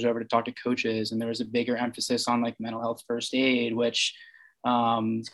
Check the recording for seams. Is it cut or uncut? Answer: uncut